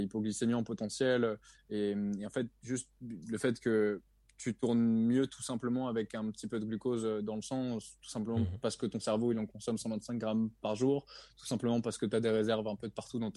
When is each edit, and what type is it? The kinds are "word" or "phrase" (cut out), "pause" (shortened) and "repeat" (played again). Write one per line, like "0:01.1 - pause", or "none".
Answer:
none